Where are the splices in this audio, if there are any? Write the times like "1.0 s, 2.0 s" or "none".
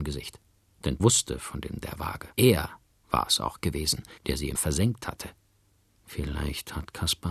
1.0 s, 1.8 s, 2.3 s, 4.2 s, 4.5 s

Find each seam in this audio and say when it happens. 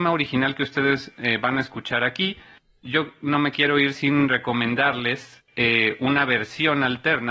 none

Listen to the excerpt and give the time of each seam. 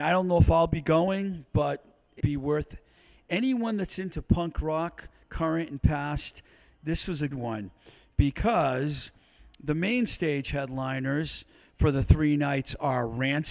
2.2 s, 7.3 s

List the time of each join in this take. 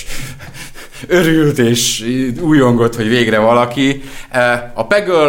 none

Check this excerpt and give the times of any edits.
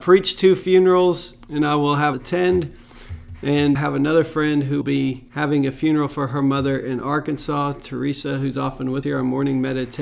1.4 s, 2.1 s, 3.7 s, 4.8 s, 5.3 s, 9.0 s

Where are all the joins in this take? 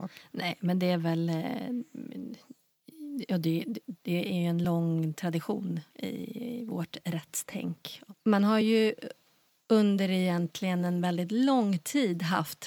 none

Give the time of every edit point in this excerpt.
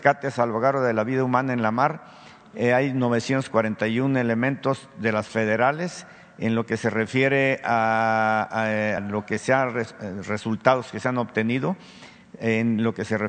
5.3 s, 9.0 s

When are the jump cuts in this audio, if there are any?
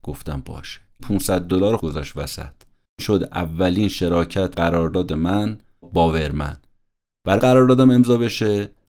1.0 s, 1.8 s, 3.0 s, 4.5 s, 5.8 s, 7.4 s

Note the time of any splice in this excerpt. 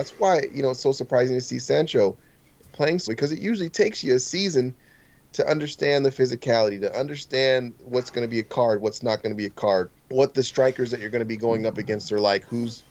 3.1 s, 10.0 s

